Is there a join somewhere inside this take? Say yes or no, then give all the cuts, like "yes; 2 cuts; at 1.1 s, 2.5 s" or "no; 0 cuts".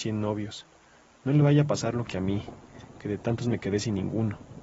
no; 0 cuts